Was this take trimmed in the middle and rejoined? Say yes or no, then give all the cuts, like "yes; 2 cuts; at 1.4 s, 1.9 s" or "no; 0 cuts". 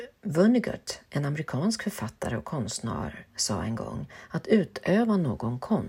no; 0 cuts